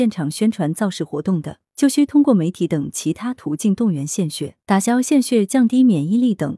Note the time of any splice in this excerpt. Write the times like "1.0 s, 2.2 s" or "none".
1.7 s, 4.6 s